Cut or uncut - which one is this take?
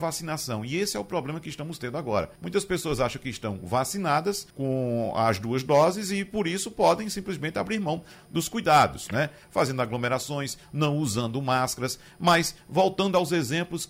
cut